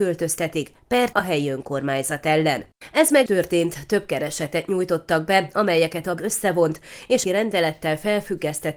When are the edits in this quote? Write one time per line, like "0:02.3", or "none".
0:01.1
0:03.3
0:06.2
0:07.2